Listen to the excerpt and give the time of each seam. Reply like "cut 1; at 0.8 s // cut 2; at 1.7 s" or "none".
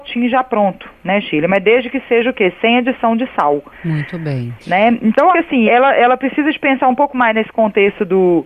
cut 1; at 3.7 s // cut 2; at 4.6 s // cut 3; at 5.3 s // cut 4; at 5.7 s